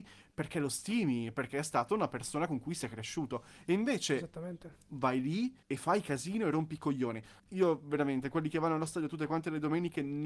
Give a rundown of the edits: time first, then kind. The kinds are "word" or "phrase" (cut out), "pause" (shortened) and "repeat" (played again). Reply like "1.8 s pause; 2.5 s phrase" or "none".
5.6 s pause; 7.4 s pause